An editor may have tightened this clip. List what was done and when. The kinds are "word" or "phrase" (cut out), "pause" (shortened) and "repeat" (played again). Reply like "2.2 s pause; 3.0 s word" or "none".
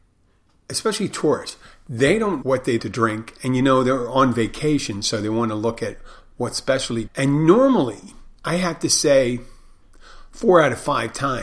2.4 s word; 2.8 s word; 7.1 s phrase; 8.4 s pause